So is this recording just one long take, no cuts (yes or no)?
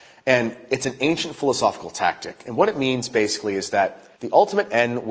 no